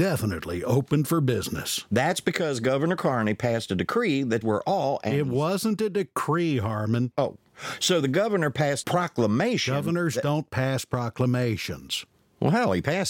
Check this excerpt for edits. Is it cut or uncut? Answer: cut